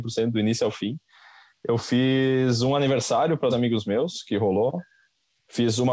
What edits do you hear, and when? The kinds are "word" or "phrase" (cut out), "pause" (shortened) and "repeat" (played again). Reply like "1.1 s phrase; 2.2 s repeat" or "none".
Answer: 3.5 s word